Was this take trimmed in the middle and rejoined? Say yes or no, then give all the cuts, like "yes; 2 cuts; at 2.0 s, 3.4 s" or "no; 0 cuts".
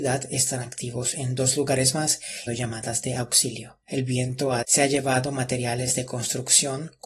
yes; 3 cuts; at 2.5 s, 3.8 s, 4.6 s